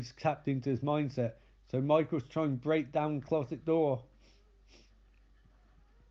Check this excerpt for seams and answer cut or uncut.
uncut